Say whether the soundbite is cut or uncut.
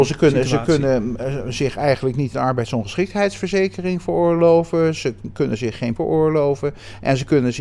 cut